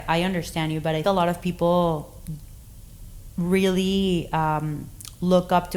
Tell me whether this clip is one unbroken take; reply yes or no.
no